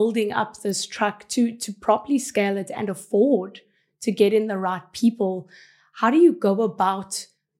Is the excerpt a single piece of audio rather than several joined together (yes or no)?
yes